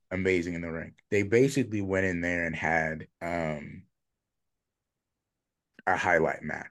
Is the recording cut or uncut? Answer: cut